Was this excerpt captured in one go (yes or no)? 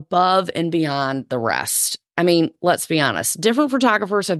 yes